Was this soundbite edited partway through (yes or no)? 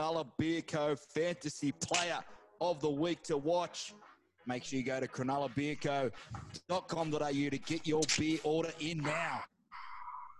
no